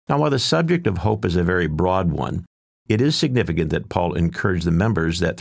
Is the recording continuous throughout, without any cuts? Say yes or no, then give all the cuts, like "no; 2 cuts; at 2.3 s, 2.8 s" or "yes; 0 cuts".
yes; 0 cuts